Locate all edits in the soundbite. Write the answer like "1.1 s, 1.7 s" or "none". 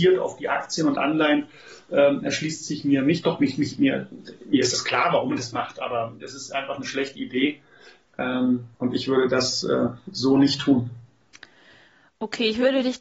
8.7 s

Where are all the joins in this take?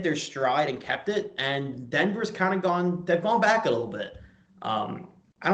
none

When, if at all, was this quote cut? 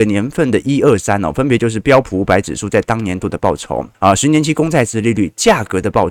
3.9 s

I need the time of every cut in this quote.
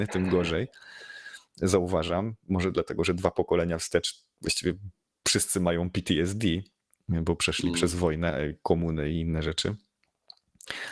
none

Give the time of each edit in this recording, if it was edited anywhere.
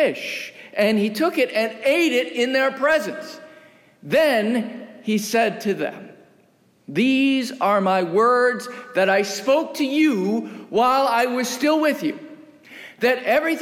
none

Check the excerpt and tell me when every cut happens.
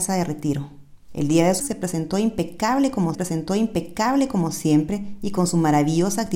1.0 s, 1.6 s, 3.1 s

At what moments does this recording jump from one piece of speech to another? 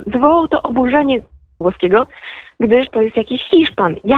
1.6 s, 2.9 s

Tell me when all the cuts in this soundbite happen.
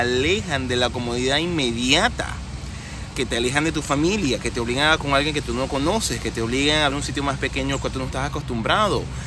5.0 s, 6.9 s

